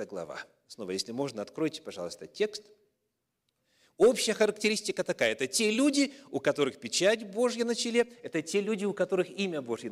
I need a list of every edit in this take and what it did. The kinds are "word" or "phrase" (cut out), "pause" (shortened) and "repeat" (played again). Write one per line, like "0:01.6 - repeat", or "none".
none